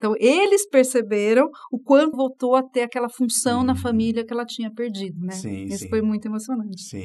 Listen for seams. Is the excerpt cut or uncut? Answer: cut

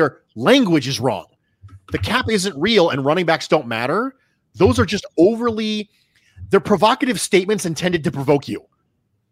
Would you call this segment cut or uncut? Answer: uncut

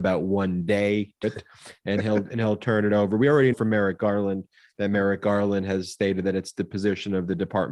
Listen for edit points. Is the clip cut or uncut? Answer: cut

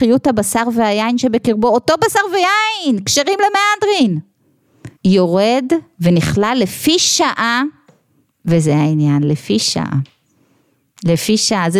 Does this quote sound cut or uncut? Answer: cut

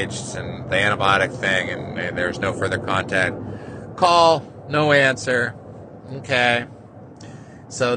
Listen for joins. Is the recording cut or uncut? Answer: uncut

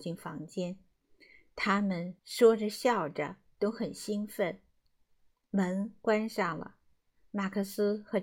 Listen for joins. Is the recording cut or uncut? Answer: cut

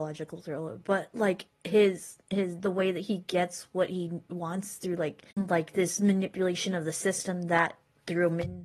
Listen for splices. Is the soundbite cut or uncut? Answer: cut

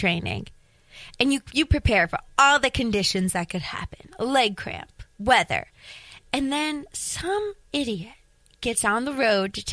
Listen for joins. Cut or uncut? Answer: uncut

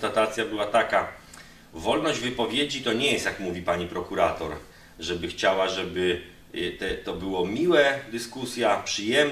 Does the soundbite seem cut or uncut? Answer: uncut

